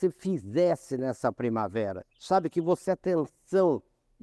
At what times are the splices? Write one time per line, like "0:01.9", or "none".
0:02.1
0:02.8

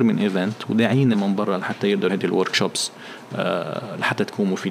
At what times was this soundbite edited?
0:01.1
0:02.1

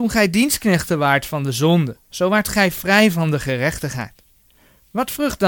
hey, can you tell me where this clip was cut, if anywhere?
0:02.0

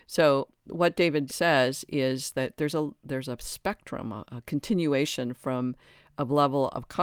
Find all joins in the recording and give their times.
0:01.3

